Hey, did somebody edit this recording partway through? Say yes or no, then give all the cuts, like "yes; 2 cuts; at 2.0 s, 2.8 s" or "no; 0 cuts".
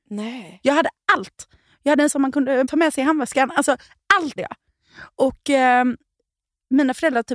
yes; 3 cuts; at 2.1 s, 2.6 s, 4.4 s